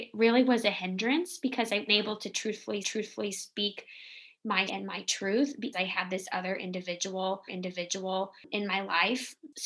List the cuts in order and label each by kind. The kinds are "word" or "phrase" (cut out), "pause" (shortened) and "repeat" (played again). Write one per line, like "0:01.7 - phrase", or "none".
0:01.9 - word
0:02.8 - repeat
0:04.7 - word
0:05.7 - word
0:07.5 - repeat